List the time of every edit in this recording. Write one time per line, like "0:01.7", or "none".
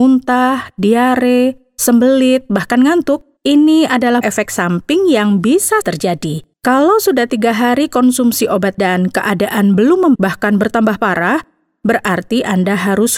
0:03.4
0:04.2
0:05.8
0:06.5
0:08.8
0:10.1